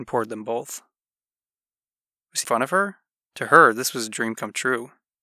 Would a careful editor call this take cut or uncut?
cut